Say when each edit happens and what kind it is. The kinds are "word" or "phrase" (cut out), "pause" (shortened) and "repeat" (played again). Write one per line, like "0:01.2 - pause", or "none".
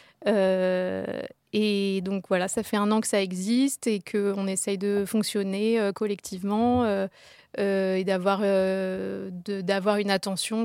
none